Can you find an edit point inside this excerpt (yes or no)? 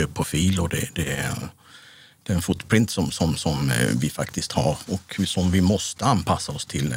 no